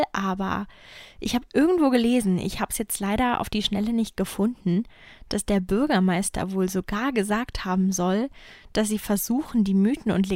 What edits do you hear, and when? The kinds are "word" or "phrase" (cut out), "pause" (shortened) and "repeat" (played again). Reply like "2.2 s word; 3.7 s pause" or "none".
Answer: none